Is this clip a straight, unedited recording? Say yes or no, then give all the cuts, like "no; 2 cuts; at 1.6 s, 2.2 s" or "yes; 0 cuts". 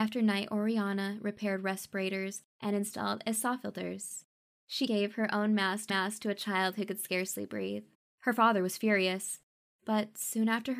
no; 4 cuts; at 2.5 s, 4.9 s, 5.9 s, 7.9 s